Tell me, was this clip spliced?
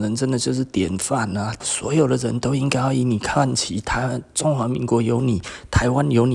yes; 1 cut; at 1.6 s

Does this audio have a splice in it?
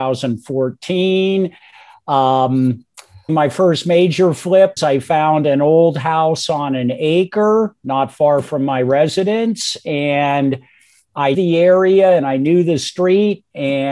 yes; 3 cuts; at 3.3 s, 4.8 s, 11.3 s

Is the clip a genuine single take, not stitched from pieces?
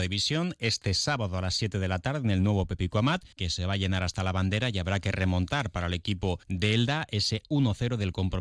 no; 2 cuts; at 3.3 s, 6.4 s

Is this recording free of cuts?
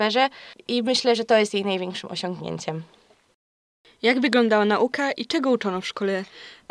yes; 0 cuts

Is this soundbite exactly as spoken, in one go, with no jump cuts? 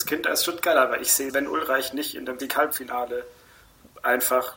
no; 2 cuts; at 1.3 s, 2.4 s

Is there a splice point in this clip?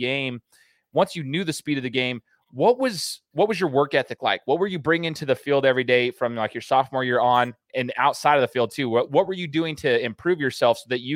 no; 0 cuts

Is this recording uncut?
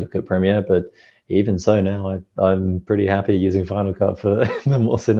yes; 0 cuts

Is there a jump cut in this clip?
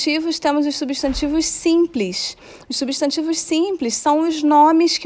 no; 0 cuts

